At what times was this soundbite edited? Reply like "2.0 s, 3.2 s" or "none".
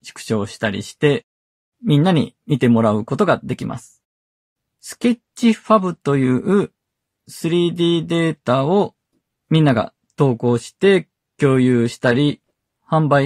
none